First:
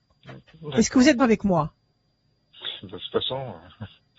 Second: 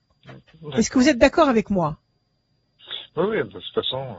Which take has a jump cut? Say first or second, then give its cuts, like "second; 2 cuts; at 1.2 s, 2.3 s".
first; 2 cuts; at 1.2 s, 2.8 s